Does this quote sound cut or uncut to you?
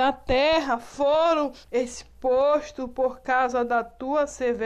cut